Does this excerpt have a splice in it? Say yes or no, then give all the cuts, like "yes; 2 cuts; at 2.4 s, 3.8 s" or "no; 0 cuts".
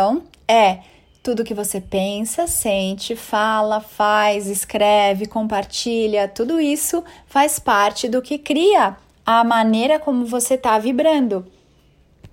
no; 0 cuts